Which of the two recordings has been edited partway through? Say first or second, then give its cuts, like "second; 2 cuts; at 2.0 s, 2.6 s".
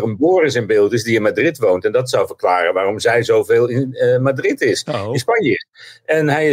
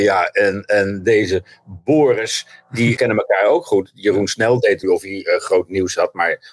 second; 2 cuts; at 3.0 s, 4.8 s